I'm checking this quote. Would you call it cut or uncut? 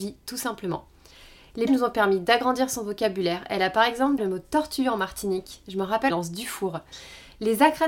cut